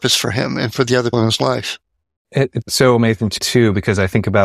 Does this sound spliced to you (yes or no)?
yes